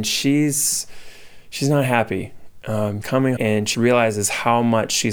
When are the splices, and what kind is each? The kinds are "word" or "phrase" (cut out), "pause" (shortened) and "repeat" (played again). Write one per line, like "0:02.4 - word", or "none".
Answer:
0:03.0 - word
0:03.4 - word
0:03.7 - word